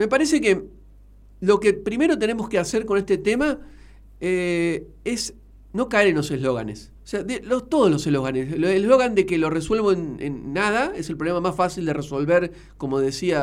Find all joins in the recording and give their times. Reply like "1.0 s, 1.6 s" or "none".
5.5 s, 6.9 s